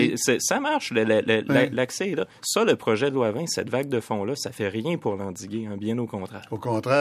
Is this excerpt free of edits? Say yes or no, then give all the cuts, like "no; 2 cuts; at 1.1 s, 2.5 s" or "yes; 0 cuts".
yes; 0 cuts